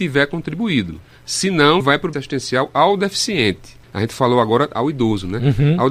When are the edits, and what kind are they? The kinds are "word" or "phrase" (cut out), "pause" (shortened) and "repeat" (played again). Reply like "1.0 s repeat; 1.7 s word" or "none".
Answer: 1.0 s pause; 1.8 s word; 2.1 s word; 3.8 s pause